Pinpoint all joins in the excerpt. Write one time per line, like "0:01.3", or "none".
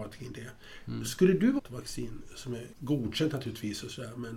0:01.6
0:02.7

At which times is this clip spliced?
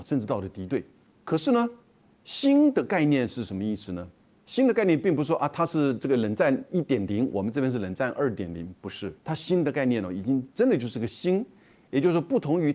0:09.2

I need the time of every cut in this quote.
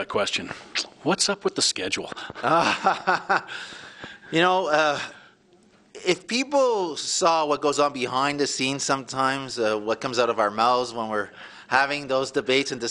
none

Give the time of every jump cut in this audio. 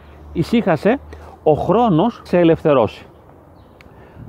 0:02.3

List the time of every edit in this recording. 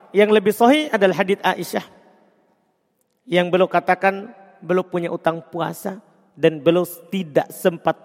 none

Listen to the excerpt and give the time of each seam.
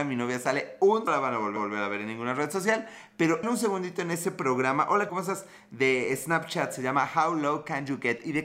0:01.1
0:01.6
0:03.4
0:05.1

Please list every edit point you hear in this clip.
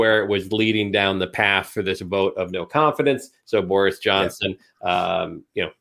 none

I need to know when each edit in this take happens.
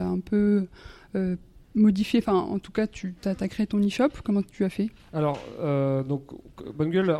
0:01.6

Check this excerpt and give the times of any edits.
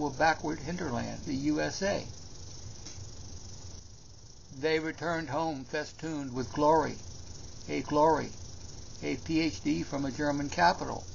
0:01.3
0:07.8

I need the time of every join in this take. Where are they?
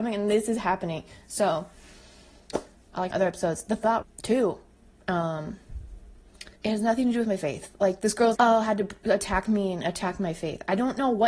0:03.1
0:04.0
0:06.6
0:08.4

